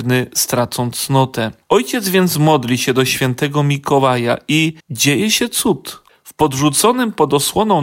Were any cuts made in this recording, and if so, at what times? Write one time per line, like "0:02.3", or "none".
0:01.6
0:04.8
0:06.1

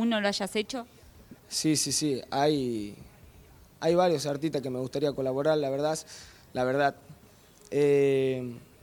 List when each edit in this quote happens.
0:01.4

